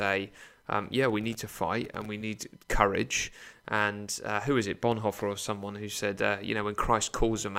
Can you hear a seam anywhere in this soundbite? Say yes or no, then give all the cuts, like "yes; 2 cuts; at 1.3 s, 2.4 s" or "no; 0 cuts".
no; 0 cuts